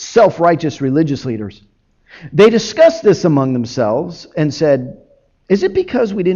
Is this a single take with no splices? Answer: yes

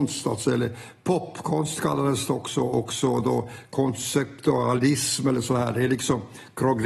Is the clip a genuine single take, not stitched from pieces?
yes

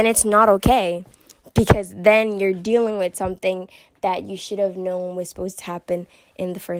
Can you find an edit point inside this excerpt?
no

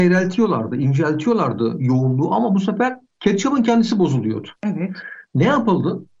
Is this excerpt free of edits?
no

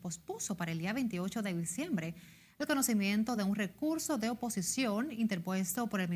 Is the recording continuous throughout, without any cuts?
yes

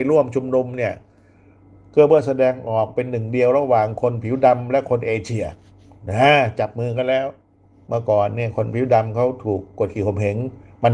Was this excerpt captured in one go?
yes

